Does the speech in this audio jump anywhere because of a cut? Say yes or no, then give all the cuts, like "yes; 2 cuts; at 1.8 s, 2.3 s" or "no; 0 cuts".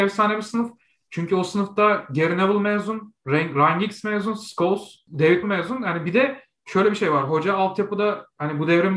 yes; 1 cut; at 5.4 s